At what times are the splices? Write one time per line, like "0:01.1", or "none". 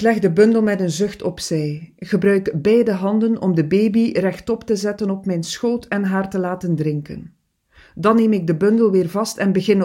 none